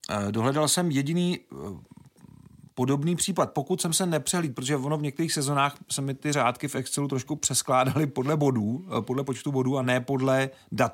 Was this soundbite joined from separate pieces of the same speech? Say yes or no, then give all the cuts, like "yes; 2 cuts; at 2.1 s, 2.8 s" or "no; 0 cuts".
no; 0 cuts